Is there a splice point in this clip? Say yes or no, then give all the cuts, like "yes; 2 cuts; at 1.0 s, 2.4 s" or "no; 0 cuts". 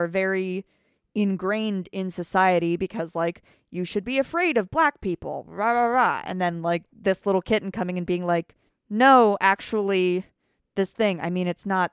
no; 0 cuts